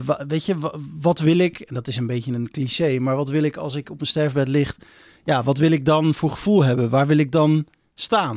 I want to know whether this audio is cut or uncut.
uncut